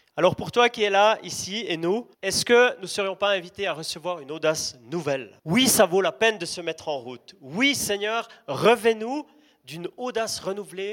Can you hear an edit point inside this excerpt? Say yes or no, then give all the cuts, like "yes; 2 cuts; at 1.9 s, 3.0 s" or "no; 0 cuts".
yes; 2 cuts; at 2.1 s, 5.4 s